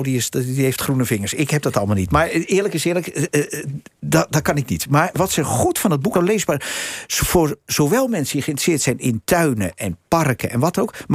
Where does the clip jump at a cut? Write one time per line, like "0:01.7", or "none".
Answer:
0:06.1